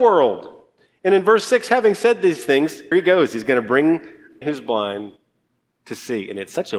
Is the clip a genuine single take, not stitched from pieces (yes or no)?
no